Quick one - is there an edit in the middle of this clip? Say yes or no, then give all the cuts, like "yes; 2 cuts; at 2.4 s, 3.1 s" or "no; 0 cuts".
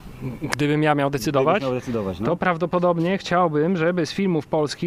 no; 0 cuts